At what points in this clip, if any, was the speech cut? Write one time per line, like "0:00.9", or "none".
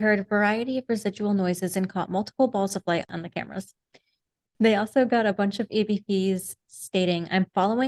none